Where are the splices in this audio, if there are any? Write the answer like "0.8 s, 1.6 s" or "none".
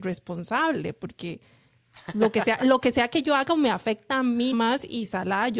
4.5 s